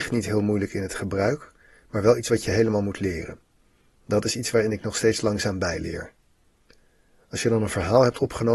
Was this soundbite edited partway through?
no; 0 cuts

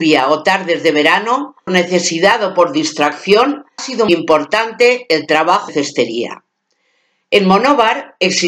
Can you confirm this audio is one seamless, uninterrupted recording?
no; 4 cuts; at 1.7 s, 3.8 s, 4.1 s, 5.7 s

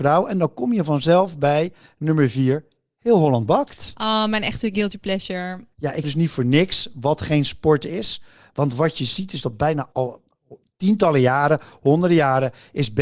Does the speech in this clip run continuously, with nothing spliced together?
no; 3 cuts; at 5.7 s, 6.0 s, 9.9 s

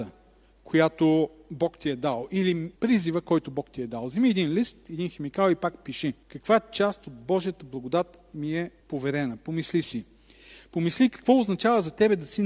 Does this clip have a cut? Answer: yes; 3 cuts; at 2.8 s, 6.2 s, 8.8 s

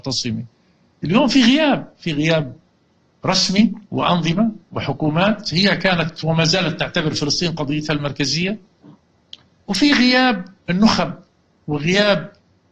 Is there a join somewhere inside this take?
yes; 1 cut; at 3.8 s

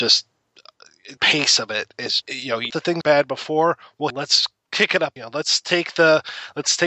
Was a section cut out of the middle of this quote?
yes; 6 cuts; at 1.2 s, 2.2 s, 2.7 s, 3.0 s, 4.1 s, 5.2 s

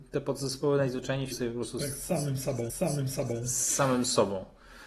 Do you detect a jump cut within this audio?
yes; 2 cuts; at 1.3 s, 2.7 s

